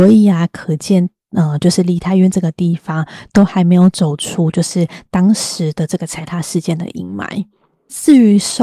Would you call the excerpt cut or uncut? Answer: uncut